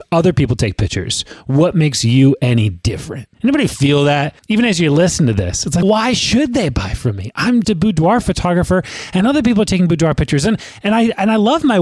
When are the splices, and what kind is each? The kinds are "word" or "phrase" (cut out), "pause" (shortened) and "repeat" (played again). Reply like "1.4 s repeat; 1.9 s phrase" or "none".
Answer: 3.3 s pause; 4.4 s pause; 5.8 s word; 7.6 s word